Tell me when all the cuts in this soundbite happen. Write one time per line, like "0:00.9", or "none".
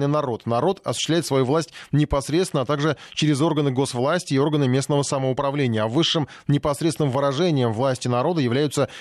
none